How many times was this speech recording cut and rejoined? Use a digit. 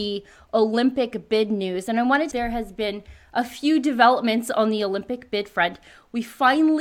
1